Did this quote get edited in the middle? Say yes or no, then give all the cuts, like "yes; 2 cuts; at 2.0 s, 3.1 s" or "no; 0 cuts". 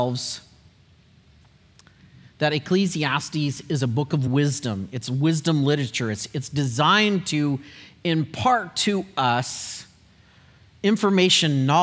no; 0 cuts